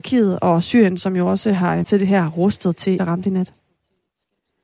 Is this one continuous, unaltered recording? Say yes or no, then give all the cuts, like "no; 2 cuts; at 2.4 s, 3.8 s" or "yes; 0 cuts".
no; 2 cuts; at 1.8 s, 3.0 s